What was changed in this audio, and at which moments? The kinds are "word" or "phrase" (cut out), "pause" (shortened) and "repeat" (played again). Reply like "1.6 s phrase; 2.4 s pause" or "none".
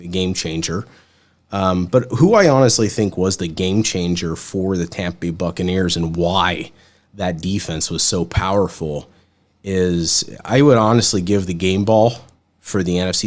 none

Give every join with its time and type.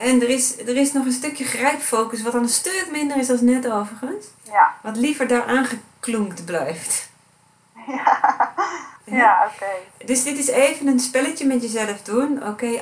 4.4 s pause; 9.0 s pause

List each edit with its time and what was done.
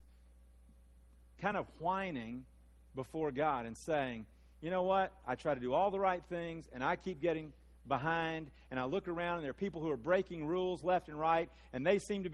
none

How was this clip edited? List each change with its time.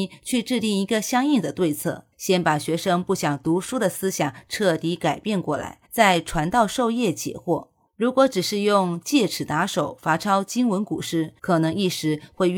2.1 s pause; 5.8 s pause; 7.9 s pause; 11.4 s pause

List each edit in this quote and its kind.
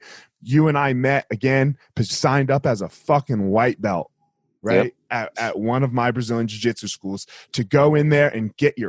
2.1 s word

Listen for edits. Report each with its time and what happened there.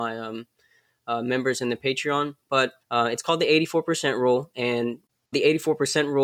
2.8 s pause; 5.3 s word

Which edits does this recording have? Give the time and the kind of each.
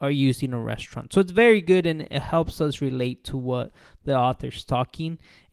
none

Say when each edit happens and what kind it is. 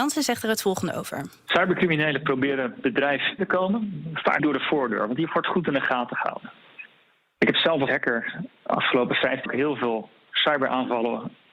3.4 s word; 4.4 s word; 7.9 s word; 9.5 s word

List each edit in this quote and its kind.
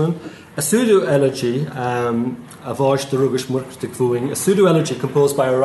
none

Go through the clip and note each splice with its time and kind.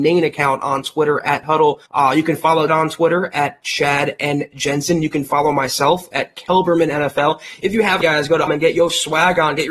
1.4 s phrase; 1.9 s pause; 2.7 s word; 8.0 s word; 8.5 s word

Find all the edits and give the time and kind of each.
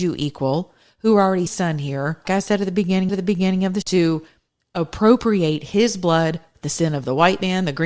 1.5 s phrase; 2.2 s word; 3.1 s repeat; 3.8 s word; 6.5 s word

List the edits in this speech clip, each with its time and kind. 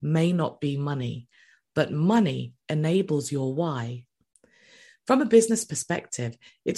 none

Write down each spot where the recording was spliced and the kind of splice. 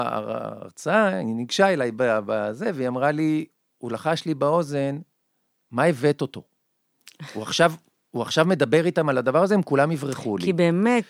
none

